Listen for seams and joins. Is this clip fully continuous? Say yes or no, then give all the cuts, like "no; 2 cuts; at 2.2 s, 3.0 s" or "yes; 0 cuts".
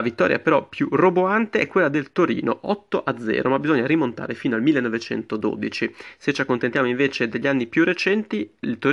yes; 0 cuts